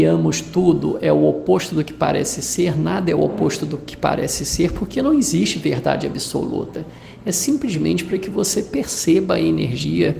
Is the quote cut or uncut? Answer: uncut